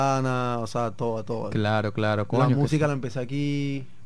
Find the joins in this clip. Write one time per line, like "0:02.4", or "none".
none